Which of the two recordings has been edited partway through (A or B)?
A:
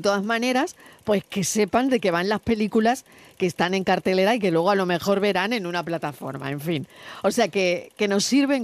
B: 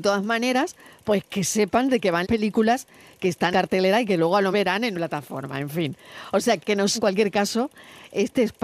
B